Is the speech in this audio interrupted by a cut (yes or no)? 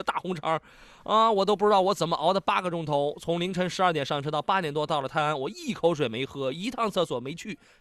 no